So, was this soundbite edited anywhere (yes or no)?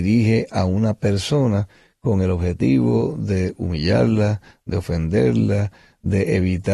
no